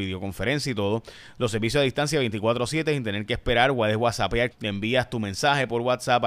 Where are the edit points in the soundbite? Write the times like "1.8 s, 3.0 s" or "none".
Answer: 4.5 s